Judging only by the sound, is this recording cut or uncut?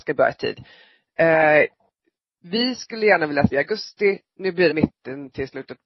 cut